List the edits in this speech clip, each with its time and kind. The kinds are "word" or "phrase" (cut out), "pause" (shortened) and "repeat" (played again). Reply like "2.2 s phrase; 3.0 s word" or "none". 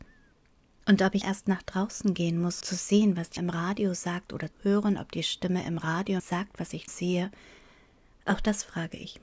1.2 s word; 2.6 s word; 3.4 s word; 4.5 s word; 6.2 s word; 6.9 s word